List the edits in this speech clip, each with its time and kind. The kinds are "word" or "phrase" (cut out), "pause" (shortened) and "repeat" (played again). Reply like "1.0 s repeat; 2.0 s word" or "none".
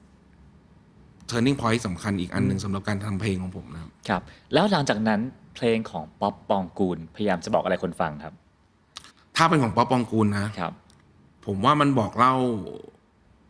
9.1 s pause; 11.0 s pause